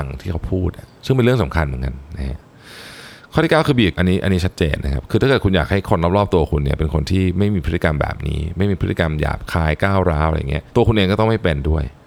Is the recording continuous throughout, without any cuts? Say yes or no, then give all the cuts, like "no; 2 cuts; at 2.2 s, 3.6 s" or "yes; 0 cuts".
no; 2 cuts; at 3.9 s, 10.7 s